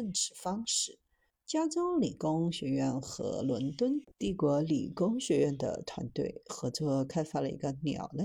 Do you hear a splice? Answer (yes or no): yes